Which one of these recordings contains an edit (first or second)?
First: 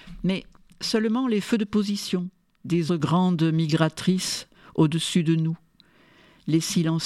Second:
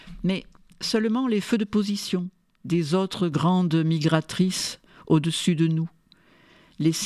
first